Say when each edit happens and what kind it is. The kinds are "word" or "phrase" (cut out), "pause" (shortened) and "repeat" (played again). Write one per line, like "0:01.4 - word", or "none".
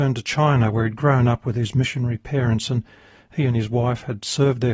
none